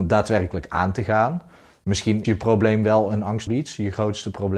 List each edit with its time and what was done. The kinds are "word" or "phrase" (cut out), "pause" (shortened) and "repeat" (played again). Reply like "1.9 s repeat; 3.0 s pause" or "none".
2.2 s word; 3.5 s word